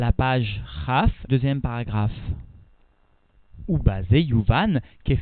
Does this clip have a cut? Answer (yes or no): yes